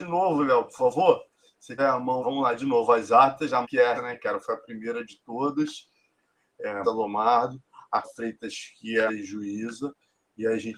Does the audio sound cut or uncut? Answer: cut